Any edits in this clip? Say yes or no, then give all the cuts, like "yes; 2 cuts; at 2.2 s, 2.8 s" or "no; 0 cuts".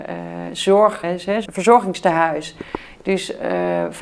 yes; 2 cuts; at 1.0 s, 1.5 s